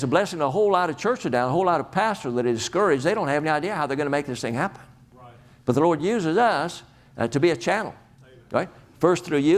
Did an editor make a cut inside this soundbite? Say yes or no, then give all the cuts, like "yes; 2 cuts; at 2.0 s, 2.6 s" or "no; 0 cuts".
no; 0 cuts